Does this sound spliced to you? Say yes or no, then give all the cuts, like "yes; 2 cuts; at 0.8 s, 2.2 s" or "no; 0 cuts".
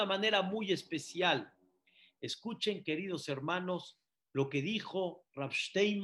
no; 0 cuts